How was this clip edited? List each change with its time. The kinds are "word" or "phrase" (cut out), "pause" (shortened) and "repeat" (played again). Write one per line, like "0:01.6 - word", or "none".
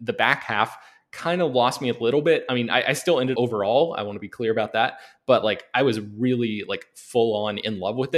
0:03.3 - phrase

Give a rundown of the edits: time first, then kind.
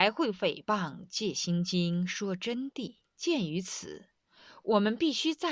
0:03.0 - pause

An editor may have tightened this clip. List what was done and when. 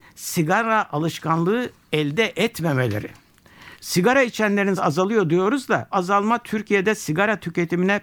0:03.7 - pause
0:04.8 - word
0:05.9 - word

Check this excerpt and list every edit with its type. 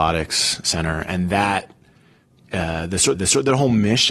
0:03.1 - repeat

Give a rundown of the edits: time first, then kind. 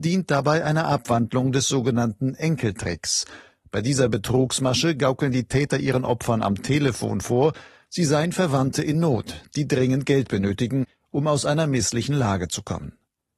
none

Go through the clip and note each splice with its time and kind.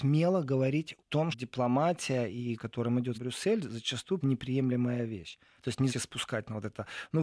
0:01.0 - word
0:01.3 - word
0:02.6 - word
0:03.1 - word
0:04.2 - word
0:05.9 - word

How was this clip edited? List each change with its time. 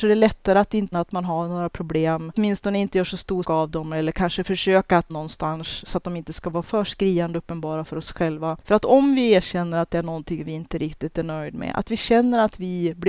0:00.9 - word
0:02.3 - word
0:03.4 - word
0:05.1 - phrase

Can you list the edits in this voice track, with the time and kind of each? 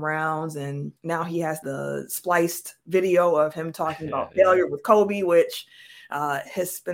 0:01.0 - pause
0:01.6 - word

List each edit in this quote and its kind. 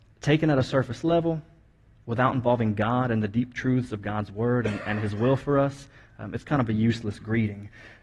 none

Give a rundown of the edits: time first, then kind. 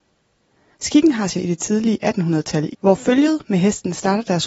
0:01.4 - word
0:02.7 - phrase

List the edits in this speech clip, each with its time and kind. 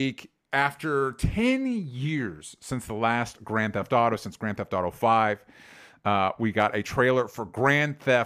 none

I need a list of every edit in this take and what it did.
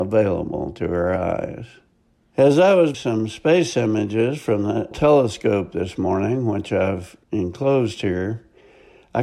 0:01.9 - pause
0:02.9 - word
0:04.9 - word
0:07.2 - pause

